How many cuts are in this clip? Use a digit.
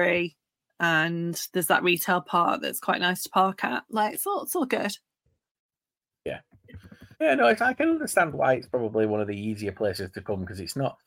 1